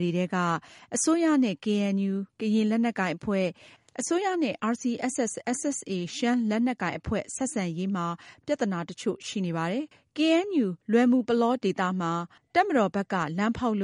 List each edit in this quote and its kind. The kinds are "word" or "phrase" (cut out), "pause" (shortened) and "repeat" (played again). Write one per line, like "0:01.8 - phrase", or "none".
0:09.9 - pause
0:10.8 - pause
0:12.4 - pause

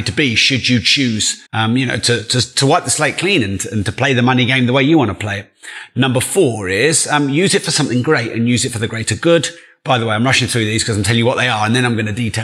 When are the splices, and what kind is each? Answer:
0:01.5 - pause

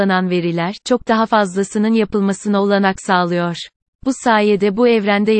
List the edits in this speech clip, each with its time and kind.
none

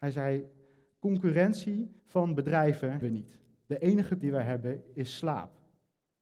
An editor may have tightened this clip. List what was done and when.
0:02.0 - pause
0:03.0 - word
0:04.2 - word

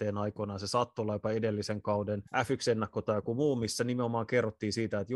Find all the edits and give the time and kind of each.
0:02.3 - pause

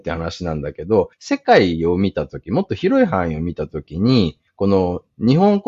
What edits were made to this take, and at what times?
0:01.1 - pause
0:04.5 - pause

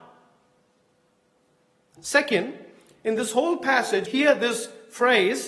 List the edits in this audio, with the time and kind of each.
0:04.1 - word

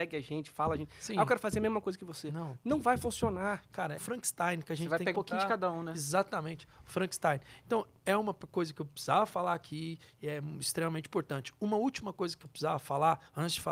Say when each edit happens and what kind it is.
0:04.0 - word
0:05.1 - word

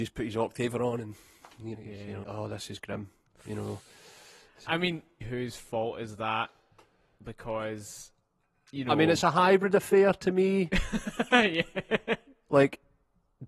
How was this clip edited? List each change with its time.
0:01.7 - word
0:02.2 - word
0:05.2 - word

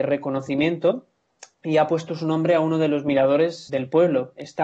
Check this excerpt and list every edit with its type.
0:03.7 - word

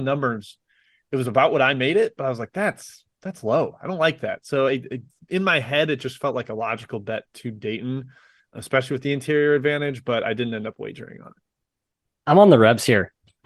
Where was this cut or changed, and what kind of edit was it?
none

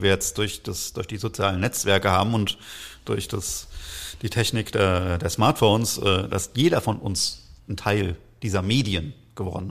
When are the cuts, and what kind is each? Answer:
0:07.6 - pause

